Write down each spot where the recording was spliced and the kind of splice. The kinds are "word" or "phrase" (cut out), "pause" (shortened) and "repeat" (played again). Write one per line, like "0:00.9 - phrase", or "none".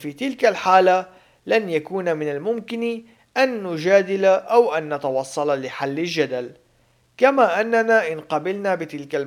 none

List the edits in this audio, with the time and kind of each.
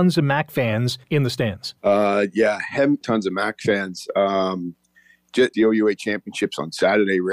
0:01.0 - pause
0:01.8 - pause
0:03.0 - phrase
0:05.5 - word

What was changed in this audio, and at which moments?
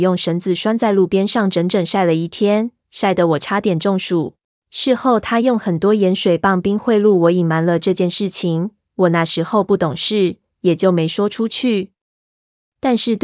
0:04.5 - pause

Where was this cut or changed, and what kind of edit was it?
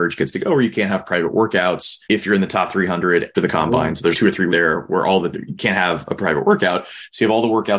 0:02.0 - pause
0:03.3 - word
0:04.1 - word
0:04.5 - word
0:05.3 - word

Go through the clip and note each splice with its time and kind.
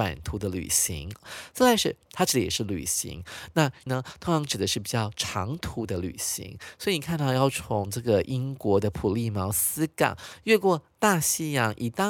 0:02.1 - word
0:03.9 - word

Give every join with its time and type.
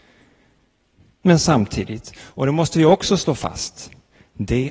none

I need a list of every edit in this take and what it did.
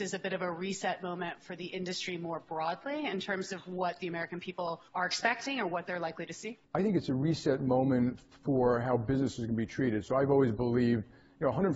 0:04.9 - pause
0:06.6 - pause

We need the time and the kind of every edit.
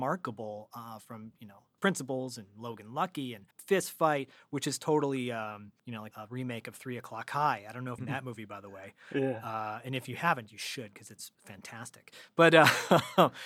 0:01.8 - word
0:03.5 - pause
0:05.8 - pause
0:06.1 - word
0:08.0 - phrase
0:11.3 - pause

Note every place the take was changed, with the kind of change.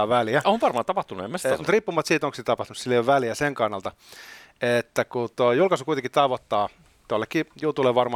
none

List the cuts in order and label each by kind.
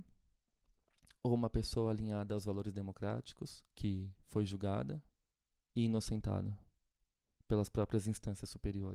0:03.7 - pause

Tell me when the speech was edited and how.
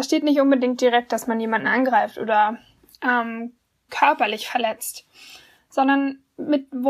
0:03.9 - word

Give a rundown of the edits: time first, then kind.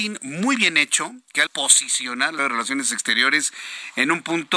0:01.5 - word
0:02.4 - word

